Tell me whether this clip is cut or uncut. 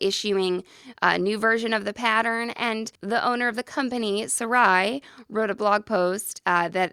cut